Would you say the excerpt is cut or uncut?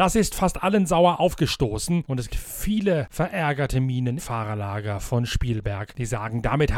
cut